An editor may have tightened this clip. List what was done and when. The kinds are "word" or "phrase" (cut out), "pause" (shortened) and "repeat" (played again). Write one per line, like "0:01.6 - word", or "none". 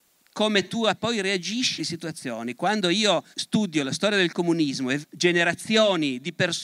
0:01.0 - word
0:01.8 - phrase
0:03.3 - pause
0:05.0 - word

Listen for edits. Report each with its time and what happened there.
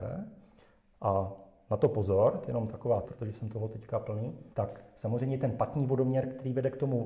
0:03.0 - phrase
0:04.5 - pause

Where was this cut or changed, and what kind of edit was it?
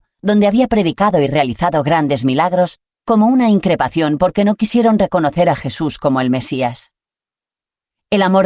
none

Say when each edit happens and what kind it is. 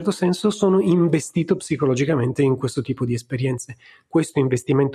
none

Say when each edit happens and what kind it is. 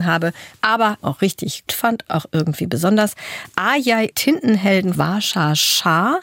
0:01.0 - word
0:01.7 - word
0:02.1 - word
0:04.1 - phrase
0:04.9 - word

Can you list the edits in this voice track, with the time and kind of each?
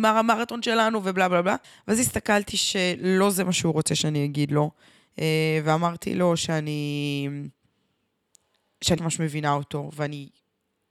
0:01.6 - pause
0:02.5 - phrase
0:09.0 - word

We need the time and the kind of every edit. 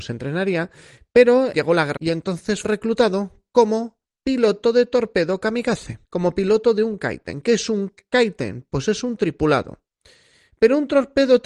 0:01.5 - word
0:02.0 - word
0:02.6 - word
0:04.0 - pause
0:06.0 - pause
0:09.2 - word

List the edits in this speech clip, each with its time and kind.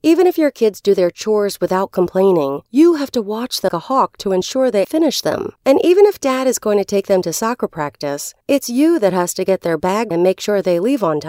0:02.7 - pause
0:03.7 - word
0:04.8 - word
0:05.6 - pause
0:08.4 - pause
0:10.1 - word

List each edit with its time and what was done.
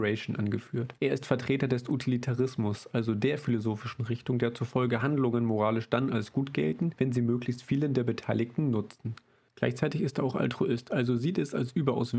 none

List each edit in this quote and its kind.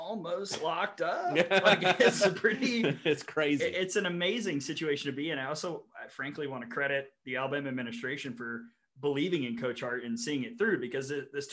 none

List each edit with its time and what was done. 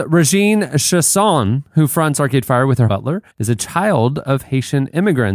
0:02.9 - phrase
0:03.3 - pause

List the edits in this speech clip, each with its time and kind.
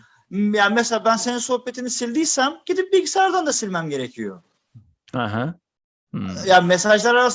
none

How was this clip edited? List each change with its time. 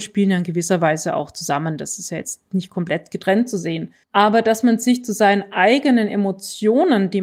0:04.0 - pause

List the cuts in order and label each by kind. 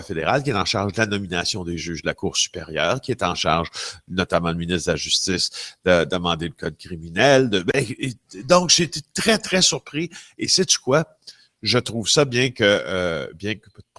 none

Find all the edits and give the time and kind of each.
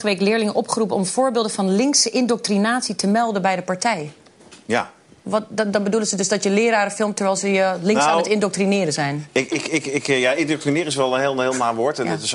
none

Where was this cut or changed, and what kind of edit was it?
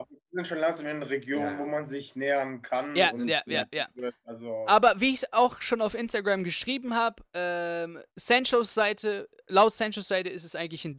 0:08.1 - pause

